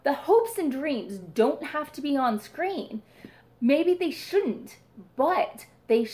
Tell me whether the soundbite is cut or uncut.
uncut